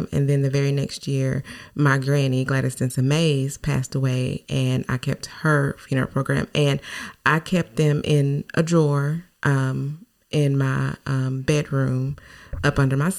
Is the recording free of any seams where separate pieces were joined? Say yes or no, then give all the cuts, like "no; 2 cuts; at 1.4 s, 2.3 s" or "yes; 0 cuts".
yes; 0 cuts